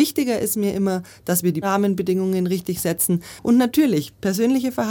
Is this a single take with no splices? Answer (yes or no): no